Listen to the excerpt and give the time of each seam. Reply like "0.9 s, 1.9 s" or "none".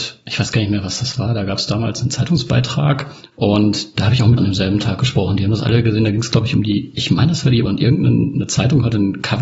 4.4 s, 7.7 s